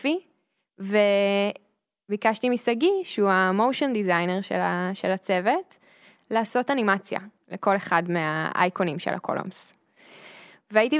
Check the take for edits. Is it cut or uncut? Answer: uncut